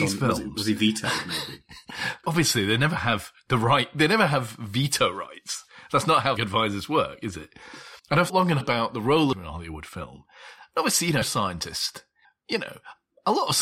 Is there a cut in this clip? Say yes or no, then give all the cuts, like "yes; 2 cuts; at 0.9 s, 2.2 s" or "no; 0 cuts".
yes; 8 cuts; at 2.2 s, 6.4 s, 8.0 s, 8.3 s, 8.6 s, 9.3 s, 11.2 s, 12.2 s